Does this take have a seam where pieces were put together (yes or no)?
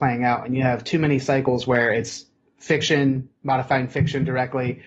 no